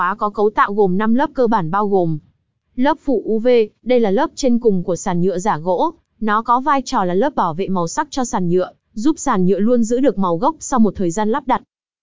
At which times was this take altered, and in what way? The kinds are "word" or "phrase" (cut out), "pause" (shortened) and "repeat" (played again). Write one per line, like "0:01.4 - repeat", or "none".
none